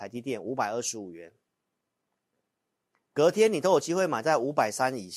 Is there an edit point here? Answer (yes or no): no